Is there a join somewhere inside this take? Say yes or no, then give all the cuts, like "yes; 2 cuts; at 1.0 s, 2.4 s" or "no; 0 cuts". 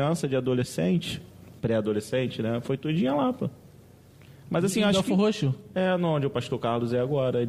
no; 0 cuts